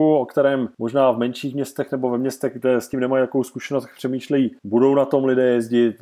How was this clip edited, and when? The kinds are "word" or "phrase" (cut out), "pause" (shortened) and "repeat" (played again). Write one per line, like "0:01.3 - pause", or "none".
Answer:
none